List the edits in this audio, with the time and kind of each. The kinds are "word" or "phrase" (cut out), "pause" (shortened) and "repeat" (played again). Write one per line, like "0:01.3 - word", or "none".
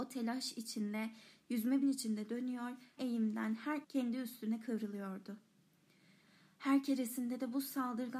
0:01.8 - phrase
0:03.0 - word
0:03.8 - phrase